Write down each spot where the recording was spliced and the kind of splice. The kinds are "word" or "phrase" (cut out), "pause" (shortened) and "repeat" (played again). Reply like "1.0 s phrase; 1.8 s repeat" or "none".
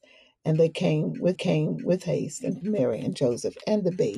1.3 s repeat; 2.6 s word